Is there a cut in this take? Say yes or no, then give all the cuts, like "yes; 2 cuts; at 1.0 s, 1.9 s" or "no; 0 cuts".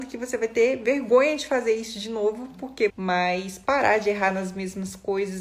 yes; 1 cut; at 2.9 s